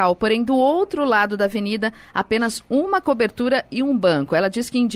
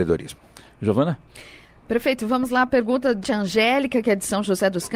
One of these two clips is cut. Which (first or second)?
second